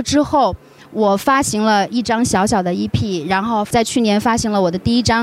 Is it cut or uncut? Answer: uncut